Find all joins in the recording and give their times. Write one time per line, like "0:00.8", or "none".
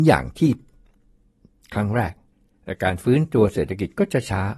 0:02.3